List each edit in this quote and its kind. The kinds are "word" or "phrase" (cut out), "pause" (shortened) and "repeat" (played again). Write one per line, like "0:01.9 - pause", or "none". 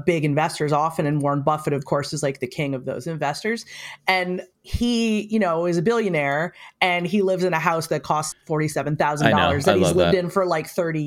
0:08.3 - word